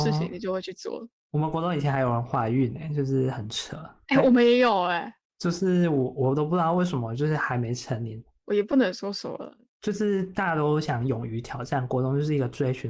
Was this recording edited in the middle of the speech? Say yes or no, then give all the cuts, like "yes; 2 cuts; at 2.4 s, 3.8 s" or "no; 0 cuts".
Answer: no; 0 cuts